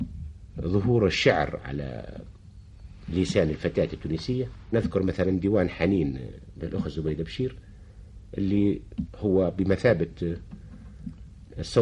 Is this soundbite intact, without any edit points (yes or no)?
yes